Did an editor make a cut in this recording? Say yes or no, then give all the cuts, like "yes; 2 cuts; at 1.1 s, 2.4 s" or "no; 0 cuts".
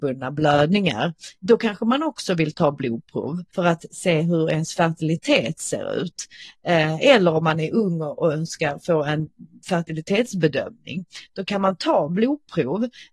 yes; 2 cuts; at 1.3 s, 3.5 s